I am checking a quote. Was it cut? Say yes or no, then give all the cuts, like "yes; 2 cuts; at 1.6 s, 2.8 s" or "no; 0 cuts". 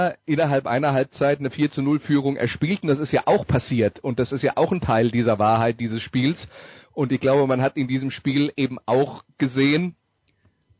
no; 0 cuts